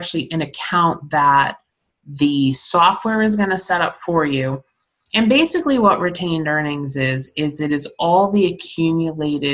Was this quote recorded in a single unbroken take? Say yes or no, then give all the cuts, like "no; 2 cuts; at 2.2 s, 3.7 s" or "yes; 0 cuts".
yes; 0 cuts